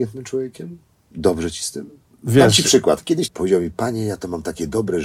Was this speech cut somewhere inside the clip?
yes; 1 cut; at 3.3 s

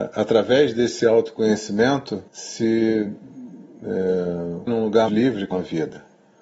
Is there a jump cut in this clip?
yes; 4 cuts; at 2.3 s, 4.7 s, 5.1 s, 5.5 s

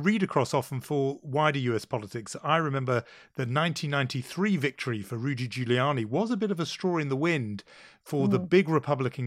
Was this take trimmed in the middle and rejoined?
no; 0 cuts

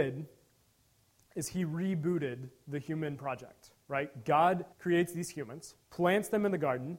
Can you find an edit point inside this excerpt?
yes; 2 cuts; at 4.7 s, 5.8 s

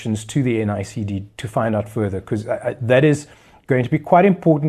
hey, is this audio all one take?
yes; 0 cuts

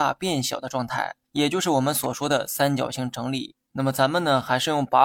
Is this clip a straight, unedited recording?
no; 2 cuts; at 1.2 s, 3.6 s

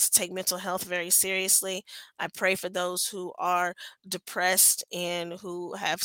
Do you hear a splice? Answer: no; 0 cuts

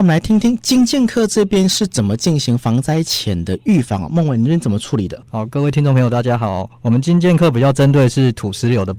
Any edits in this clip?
yes; 1 cut; at 5.3 s

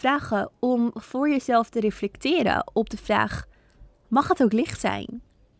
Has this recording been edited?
no; 0 cuts

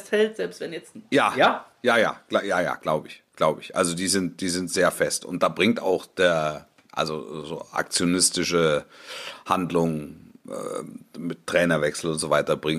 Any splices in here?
no; 0 cuts

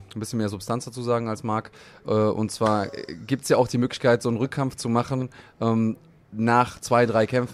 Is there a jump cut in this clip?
no; 0 cuts

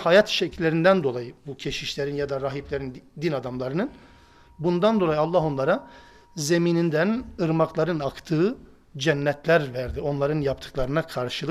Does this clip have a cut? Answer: no; 0 cuts

